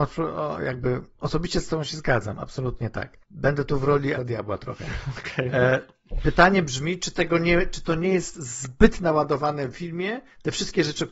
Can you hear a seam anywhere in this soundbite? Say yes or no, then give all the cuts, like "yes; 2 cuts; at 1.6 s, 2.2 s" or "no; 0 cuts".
yes; 3 cuts; at 3.2 s, 4.2 s, 9.7 s